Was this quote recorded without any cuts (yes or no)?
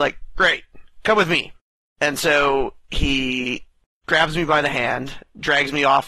yes